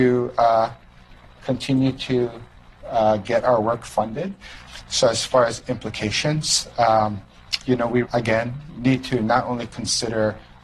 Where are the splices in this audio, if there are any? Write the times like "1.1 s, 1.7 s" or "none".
8.0 s